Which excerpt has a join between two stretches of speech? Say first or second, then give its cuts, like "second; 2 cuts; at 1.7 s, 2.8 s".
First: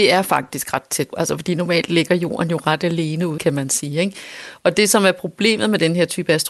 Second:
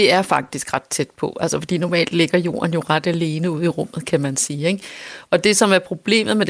first; 2 cuts; at 1.1 s, 3.4 s